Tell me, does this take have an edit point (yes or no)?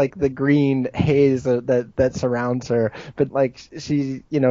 yes